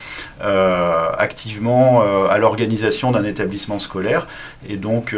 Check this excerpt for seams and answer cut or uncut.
uncut